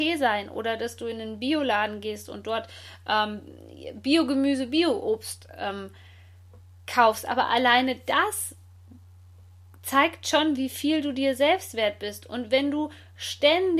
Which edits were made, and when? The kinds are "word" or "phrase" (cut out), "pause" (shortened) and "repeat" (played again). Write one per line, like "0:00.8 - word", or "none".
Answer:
none